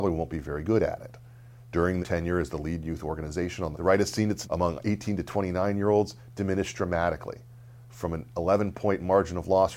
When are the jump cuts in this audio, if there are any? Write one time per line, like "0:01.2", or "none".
0:02.0
0:03.7
0:04.4